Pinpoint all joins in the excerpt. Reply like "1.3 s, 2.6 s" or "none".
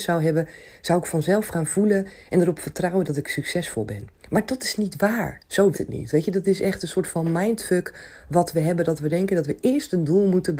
4.2 s, 5.7 s